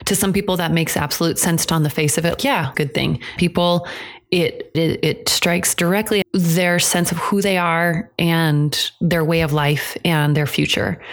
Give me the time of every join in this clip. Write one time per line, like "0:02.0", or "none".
0:01.7
0:02.4
0:02.7
0:03.4
0:04.7
0:06.2